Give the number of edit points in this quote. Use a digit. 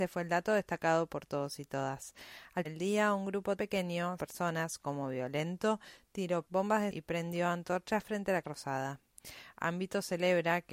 6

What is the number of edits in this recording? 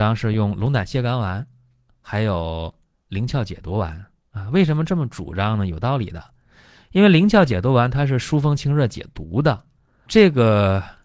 1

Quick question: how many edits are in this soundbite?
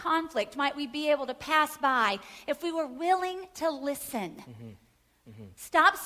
0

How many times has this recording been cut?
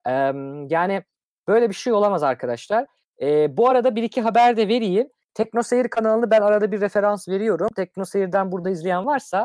0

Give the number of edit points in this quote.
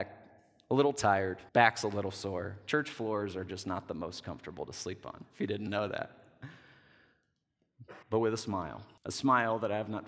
3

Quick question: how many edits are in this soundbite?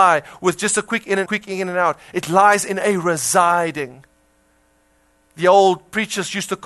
1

